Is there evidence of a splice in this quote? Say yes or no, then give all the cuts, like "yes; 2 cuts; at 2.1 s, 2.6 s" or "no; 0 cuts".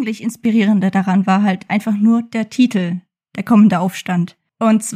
no; 0 cuts